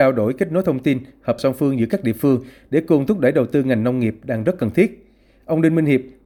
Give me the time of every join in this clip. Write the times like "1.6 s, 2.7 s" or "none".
1.4 s